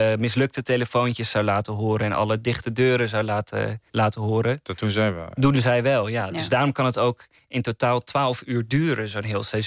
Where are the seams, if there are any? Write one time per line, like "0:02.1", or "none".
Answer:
0:03.9